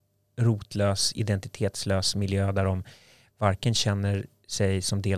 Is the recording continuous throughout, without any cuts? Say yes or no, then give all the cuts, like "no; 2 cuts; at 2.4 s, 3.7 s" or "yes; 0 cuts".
yes; 0 cuts